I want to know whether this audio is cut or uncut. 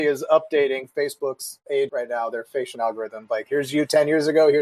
cut